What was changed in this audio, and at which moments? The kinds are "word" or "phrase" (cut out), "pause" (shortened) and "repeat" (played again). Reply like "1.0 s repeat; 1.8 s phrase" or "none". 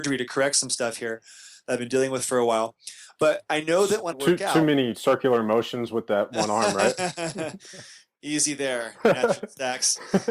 4.1 s word